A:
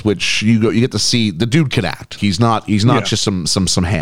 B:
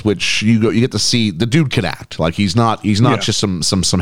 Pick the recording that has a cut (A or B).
A